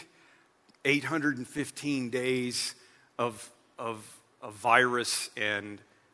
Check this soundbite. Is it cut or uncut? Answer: uncut